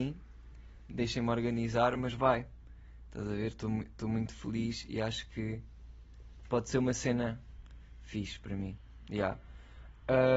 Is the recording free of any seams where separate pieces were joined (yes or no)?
yes